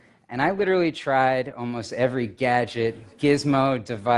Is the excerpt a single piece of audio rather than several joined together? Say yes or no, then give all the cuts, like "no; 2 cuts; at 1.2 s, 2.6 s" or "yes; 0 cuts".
yes; 0 cuts